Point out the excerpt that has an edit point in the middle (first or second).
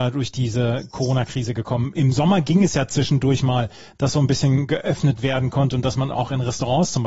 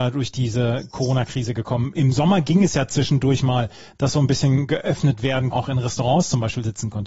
second